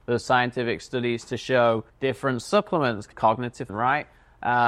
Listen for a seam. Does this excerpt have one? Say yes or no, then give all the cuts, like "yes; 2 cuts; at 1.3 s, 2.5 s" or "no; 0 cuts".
yes; 3 cuts; at 1.9 s, 3.1 s, 3.7 s